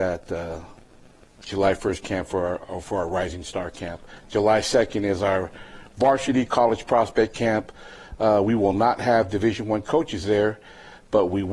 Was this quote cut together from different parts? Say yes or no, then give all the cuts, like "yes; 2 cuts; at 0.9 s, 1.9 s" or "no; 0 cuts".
no; 0 cuts